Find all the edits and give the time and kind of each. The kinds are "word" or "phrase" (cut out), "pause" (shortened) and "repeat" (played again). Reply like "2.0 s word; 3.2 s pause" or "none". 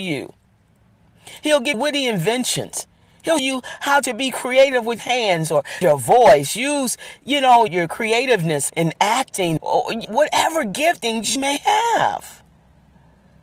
1.7 s word; 3.4 s word; 5.0 s word; 5.8 s word; 7.7 s word; 8.7 s word; 9.6 s word; 10.0 s word; 11.4 s word